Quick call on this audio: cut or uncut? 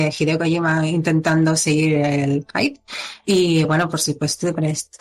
uncut